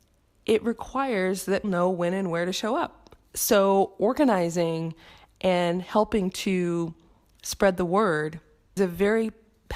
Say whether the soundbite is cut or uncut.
cut